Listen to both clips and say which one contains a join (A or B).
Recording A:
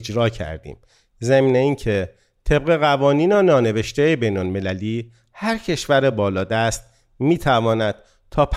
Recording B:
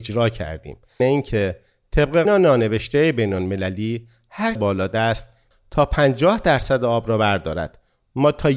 B